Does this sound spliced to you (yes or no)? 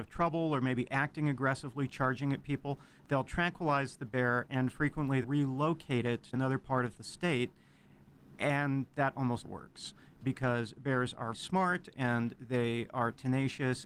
yes